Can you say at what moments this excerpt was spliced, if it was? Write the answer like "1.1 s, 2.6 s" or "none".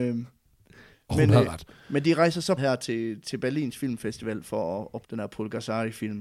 0.9 s, 2.6 s, 5.0 s